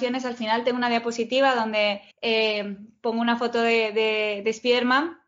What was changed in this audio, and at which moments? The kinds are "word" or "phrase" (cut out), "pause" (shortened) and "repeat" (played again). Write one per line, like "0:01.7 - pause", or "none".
0:02.1 - pause